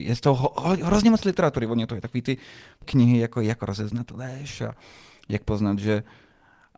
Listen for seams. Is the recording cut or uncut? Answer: uncut